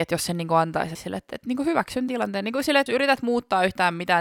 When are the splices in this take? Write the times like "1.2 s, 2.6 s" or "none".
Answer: 0.9 s, 1.3 s, 2.1 s, 2.9 s